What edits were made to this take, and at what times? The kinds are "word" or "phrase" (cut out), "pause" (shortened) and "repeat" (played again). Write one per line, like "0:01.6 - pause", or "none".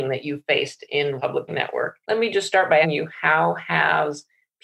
0:01.2 - phrase
0:01.5 - word
0:02.0 - pause
0:02.8 - word